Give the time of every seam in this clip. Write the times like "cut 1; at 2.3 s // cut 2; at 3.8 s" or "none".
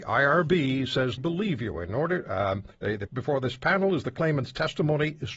cut 1; at 1.2 s // cut 2; at 2.7 s // cut 3; at 3.1 s